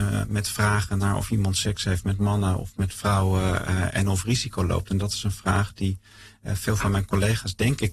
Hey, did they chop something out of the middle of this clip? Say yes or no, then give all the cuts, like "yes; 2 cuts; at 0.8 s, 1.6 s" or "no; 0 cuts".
no; 0 cuts